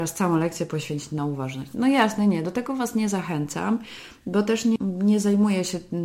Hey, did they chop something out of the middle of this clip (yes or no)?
no